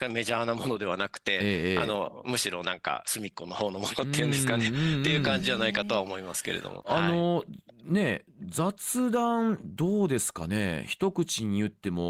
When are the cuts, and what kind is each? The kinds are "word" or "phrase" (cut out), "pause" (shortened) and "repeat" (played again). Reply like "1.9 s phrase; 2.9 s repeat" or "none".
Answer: none

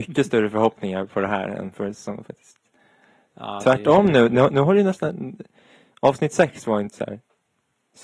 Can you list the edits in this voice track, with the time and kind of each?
none

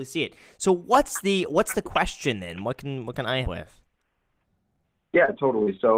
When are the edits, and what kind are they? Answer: 3.4 s word

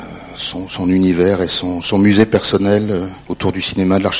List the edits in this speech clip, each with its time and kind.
3.2 s pause

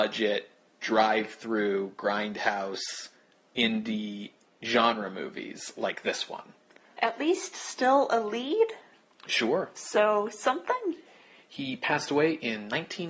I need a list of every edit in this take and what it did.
none

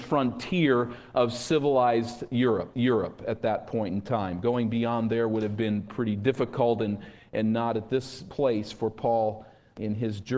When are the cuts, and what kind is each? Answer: 2.7 s repeat

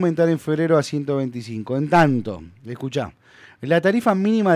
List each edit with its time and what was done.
none

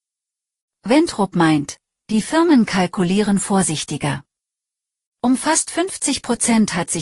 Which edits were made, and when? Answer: none

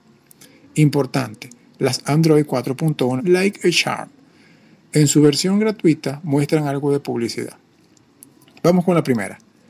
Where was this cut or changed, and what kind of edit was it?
2.0 s phrase; 3.2 s phrase

